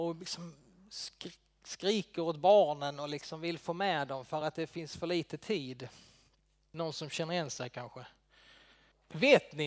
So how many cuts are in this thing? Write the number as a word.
zero